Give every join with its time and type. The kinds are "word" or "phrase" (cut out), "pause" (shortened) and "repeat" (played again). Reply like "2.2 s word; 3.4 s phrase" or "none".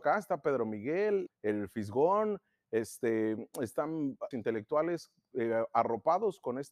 1.3 s word; 4.3 s word